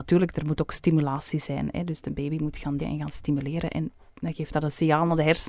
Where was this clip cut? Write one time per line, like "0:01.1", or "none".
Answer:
0:02.8